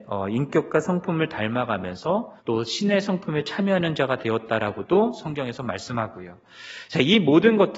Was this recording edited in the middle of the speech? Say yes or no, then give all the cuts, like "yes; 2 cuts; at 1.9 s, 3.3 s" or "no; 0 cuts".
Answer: yes; 1 cut; at 2.4 s